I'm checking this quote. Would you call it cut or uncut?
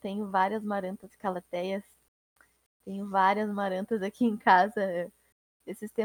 cut